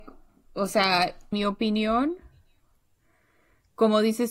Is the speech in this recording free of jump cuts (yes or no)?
no